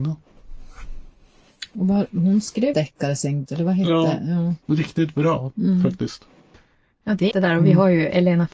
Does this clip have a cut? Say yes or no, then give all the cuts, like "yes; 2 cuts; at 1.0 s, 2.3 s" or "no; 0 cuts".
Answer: yes; 5 cuts; at 2.7 s, 3.5 s, 4.6 s, 6.5 s, 7.3 s